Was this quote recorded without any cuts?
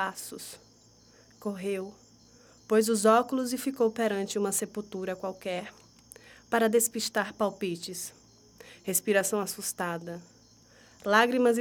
yes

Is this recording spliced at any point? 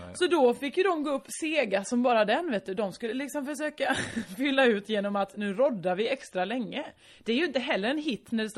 no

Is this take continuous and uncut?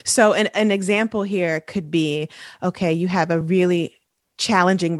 yes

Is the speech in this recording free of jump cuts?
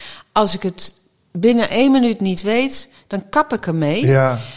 yes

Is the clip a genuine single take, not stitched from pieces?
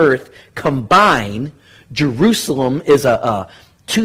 yes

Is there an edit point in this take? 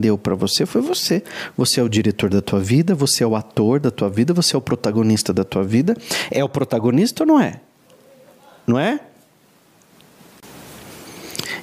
no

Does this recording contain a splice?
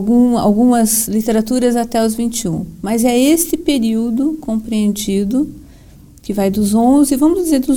no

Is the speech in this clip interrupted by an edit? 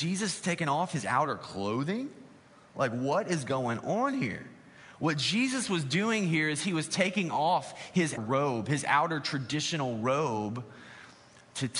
yes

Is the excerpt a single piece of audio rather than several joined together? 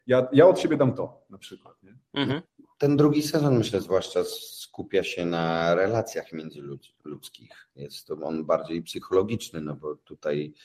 yes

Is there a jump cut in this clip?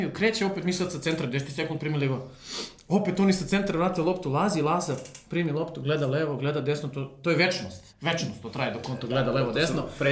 yes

